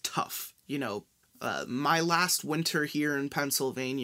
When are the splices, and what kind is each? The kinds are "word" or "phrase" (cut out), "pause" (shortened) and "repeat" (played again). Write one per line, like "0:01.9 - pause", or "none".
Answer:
0:01.2 - pause